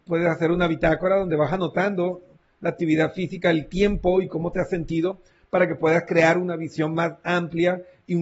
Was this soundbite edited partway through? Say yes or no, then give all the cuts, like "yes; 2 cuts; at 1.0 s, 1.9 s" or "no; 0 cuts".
no; 0 cuts